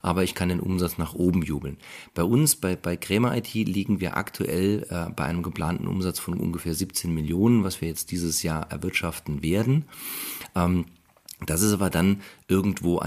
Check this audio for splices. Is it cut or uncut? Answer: uncut